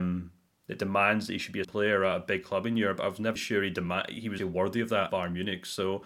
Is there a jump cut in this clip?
yes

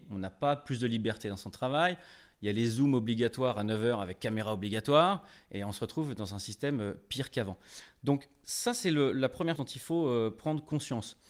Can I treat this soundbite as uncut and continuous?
no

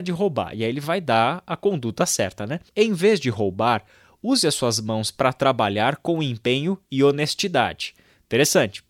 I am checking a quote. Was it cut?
yes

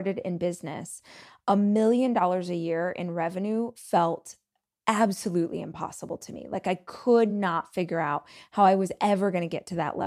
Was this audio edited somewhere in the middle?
no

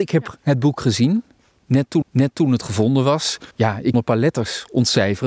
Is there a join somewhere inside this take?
yes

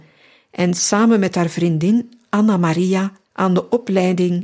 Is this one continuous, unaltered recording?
no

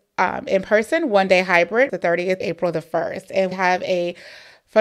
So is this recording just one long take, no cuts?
no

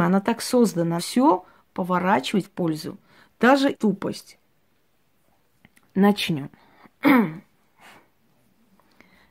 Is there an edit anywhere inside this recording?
yes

